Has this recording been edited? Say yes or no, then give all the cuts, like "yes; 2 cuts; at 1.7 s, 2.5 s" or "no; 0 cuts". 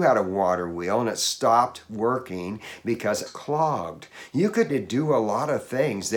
yes; 2 cuts; at 3.3 s, 4.7 s